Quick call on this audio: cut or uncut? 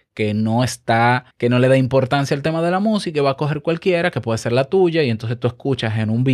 cut